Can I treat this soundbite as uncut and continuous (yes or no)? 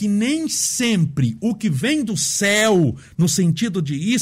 yes